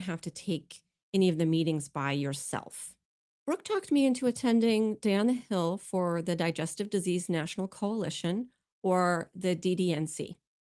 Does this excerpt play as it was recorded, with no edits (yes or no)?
yes